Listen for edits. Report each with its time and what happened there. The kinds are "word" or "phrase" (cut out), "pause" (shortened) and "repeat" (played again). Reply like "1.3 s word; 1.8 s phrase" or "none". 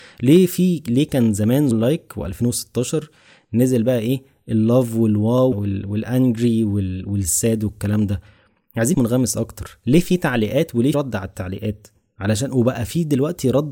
1.7 s word; 5.5 s word; 8.9 s word; 10.9 s word